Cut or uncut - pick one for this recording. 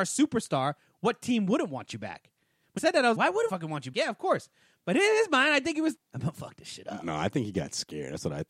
cut